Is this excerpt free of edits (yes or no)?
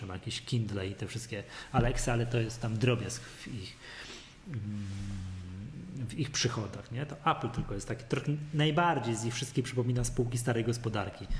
yes